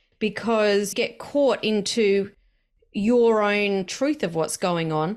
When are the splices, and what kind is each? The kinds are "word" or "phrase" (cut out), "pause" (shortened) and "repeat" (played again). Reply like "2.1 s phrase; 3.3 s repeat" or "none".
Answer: 0.9 s word; 3.9 s phrase